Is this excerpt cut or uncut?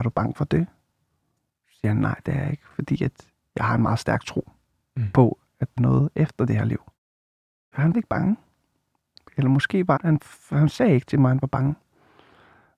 cut